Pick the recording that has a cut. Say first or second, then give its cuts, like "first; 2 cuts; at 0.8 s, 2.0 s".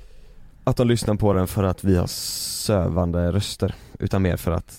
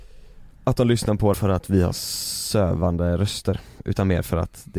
second; 1 cut; at 1.3 s